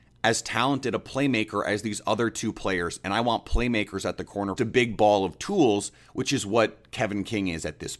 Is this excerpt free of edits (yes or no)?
no